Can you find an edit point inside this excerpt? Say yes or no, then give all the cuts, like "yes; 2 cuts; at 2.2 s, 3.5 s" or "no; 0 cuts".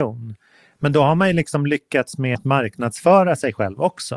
yes; 1 cut; at 2.3 s